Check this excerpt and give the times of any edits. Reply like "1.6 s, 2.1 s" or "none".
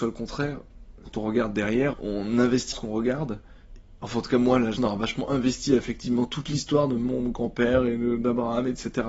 1.9 s, 2.7 s, 4.8 s